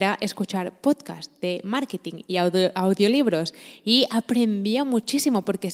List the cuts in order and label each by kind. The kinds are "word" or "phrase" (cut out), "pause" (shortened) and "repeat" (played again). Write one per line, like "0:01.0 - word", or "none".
none